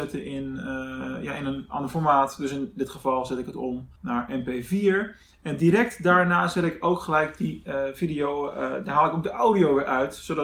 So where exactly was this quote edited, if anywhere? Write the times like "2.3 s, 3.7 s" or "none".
4.0 s